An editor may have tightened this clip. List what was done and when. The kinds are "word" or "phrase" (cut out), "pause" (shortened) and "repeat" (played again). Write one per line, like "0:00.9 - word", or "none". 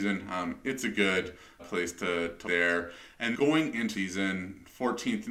0:01.6 - word
0:02.4 - word
0:03.3 - word
0:03.9 - word

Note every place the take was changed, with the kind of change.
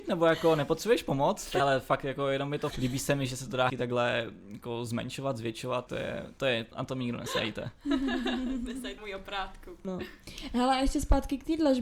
0:01.6 - phrase
0:02.7 - phrase
0:03.7 - word
0:05.9 - word
0:06.7 - phrase
0:09.0 - word
0:09.8 - word

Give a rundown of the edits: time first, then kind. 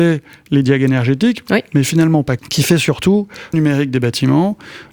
0:02.4 - word
0:03.5 - phrase

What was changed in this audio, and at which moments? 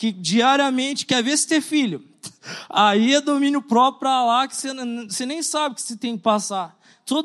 none

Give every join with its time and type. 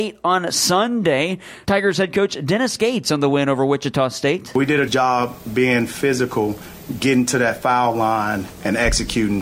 0:04.9 - word

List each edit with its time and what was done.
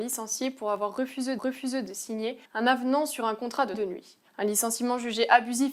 0:01.4 - repeat
0:02.5 - pause
0:03.7 - word
0:04.3 - pause

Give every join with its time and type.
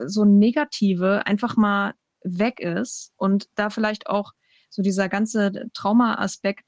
none

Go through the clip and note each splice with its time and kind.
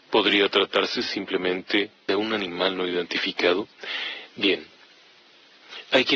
0:02.1 - word

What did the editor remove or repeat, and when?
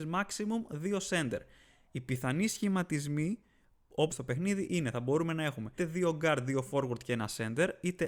0:04.1 - word
0:05.8 - word

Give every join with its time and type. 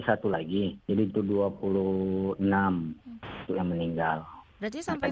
0:01.1 - word
0:03.5 - word

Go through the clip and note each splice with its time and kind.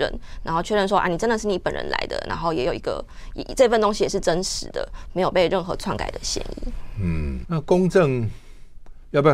0:07.4 - word

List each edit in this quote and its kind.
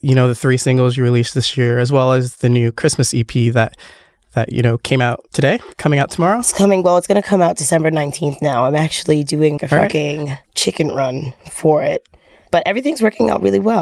0:09.6 - word
0:10.4 - pause

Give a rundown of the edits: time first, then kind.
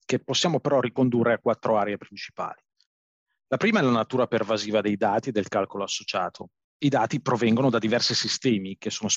none

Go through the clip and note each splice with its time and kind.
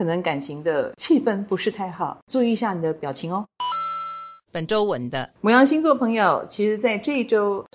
0:05.4 - pause

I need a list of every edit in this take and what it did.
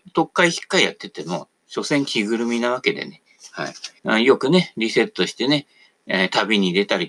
0:04.0 - pause

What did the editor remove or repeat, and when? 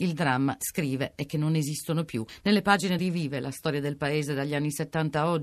0:03.0 - phrase

